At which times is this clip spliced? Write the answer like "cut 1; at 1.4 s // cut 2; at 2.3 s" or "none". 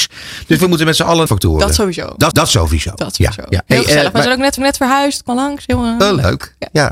cut 1; at 1.3 s // cut 2; at 2.3 s // cut 3; at 3.7 s // cut 4; at 4.6 s // cut 5; at 5.3 s